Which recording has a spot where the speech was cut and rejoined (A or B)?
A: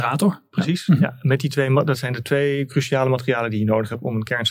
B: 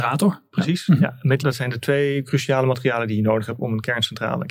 B